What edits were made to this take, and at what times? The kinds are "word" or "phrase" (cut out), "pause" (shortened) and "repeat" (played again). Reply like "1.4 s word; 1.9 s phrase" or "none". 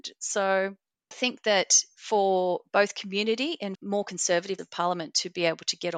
1.1 s word; 3.7 s word; 4.6 s word